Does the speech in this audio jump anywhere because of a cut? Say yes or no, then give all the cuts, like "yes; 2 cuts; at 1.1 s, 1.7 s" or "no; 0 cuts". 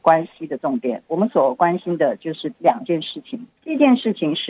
yes; 1 cut; at 3.6 s